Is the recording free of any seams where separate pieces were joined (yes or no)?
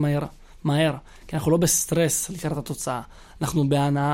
yes